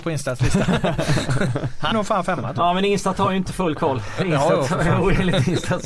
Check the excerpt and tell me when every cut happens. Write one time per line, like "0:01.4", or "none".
0:01.9